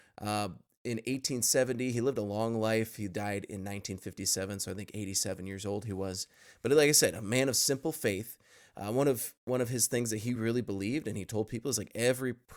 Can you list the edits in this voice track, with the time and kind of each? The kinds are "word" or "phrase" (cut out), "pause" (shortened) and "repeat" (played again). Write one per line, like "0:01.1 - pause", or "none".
none

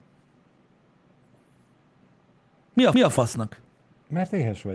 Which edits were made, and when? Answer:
0:02.9 - repeat

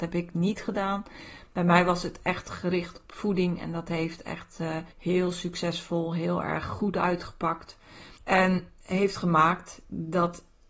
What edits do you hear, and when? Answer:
0:04.9 - pause
0:08.2 - pause

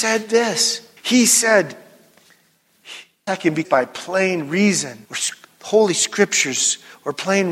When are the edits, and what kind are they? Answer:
0:01.0 - pause
0:03.3 - word
0:03.6 - word
0:05.0 - pause

